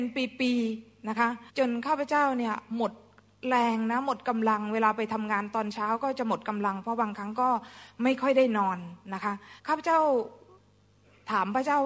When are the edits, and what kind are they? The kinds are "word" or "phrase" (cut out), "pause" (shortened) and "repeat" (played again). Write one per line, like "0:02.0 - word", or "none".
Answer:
0:01.5 - pause
0:09.6 - pause